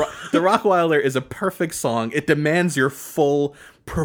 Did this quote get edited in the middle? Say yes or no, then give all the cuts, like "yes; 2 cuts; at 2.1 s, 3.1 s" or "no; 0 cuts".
no; 0 cuts